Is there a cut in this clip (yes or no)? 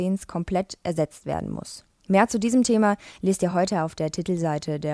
no